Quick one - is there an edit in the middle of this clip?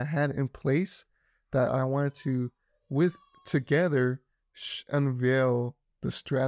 no; 0 cuts

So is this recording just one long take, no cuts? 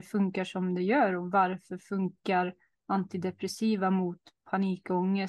yes; 0 cuts

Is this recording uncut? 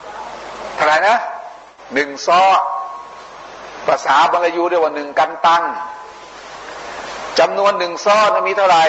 yes; 0 cuts

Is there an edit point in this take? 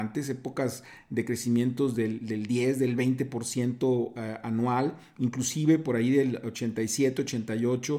no; 0 cuts

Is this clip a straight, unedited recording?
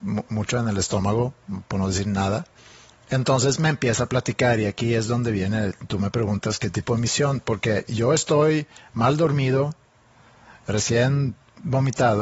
yes; 0 cuts

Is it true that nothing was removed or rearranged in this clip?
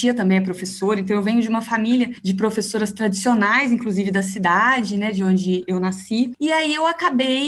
yes; 0 cuts

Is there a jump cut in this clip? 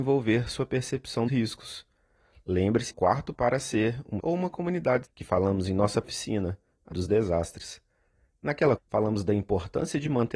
yes; 8 cuts; at 1.3 s, 2.9 s, 3.3 s, 4.2 s, 5.0 s, 6.0 s, 6.9 s, 8.8 s

